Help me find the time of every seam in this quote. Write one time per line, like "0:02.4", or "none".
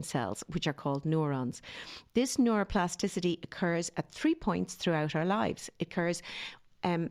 none